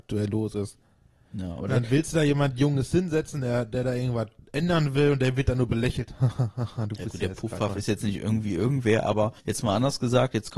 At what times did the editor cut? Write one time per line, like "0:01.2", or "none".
0:09.4